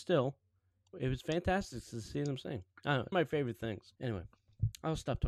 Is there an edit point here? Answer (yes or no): yes